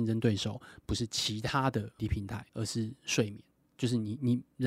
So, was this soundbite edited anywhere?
yes; 3 cuts; at 2.0 s, 2.5 s, 3.5 s

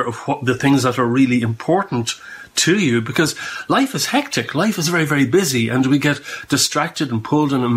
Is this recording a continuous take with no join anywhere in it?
yes; 0 cuts

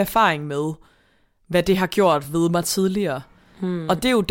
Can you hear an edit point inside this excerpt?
no; 0 cuts

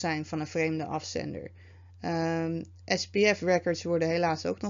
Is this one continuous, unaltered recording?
yes; 0 cuts

